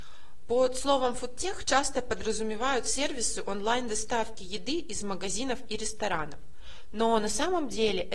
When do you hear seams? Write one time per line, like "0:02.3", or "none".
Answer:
none